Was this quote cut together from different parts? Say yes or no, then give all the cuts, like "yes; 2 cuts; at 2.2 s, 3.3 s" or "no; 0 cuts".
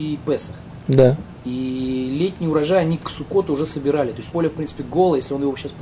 yes; 1 cut; at 4.3 s